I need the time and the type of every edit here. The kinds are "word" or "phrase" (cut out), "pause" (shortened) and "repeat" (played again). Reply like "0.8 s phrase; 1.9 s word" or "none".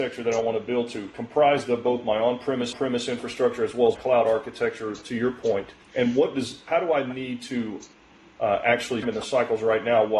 2.7 s repeat; 3.9 s word; 5.8 s pause; 6.7 s word; 9.0 s phrase